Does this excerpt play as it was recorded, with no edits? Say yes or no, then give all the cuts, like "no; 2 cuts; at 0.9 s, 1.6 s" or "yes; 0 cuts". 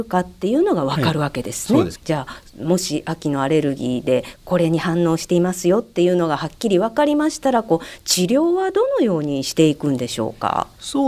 no; 1 cut; at 2.0 s